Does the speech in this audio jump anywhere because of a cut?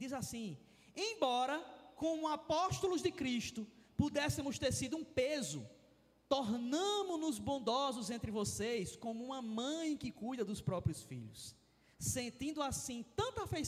no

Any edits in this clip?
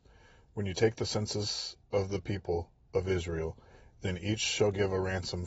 no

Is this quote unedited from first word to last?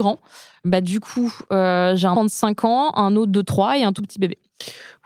no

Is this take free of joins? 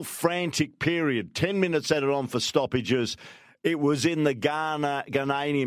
yes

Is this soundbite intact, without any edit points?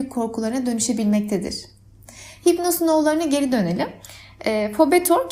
yes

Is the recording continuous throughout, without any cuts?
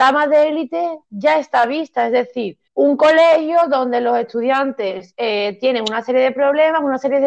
no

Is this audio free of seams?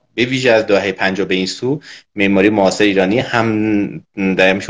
yes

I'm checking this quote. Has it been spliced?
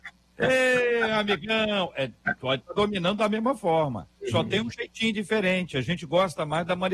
yes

